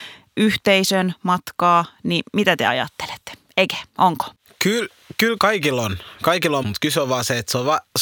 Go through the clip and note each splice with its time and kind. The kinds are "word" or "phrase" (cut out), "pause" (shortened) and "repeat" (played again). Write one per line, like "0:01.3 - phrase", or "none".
0:05.4 - word
0:06.6 - word